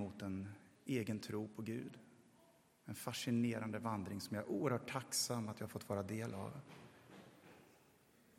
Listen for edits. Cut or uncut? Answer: uncut